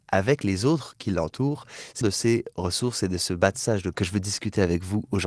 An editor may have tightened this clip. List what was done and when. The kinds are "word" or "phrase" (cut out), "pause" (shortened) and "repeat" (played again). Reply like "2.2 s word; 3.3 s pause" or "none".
2.0 s word; 3.9 s word